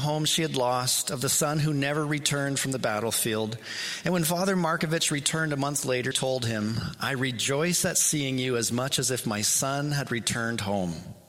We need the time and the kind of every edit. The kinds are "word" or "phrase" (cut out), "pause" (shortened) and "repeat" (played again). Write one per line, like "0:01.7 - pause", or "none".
0:06.1 - word